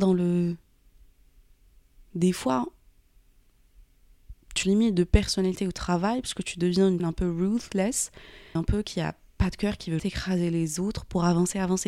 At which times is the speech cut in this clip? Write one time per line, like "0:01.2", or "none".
0:04.6
0:07.0
0:08.6
0:10.0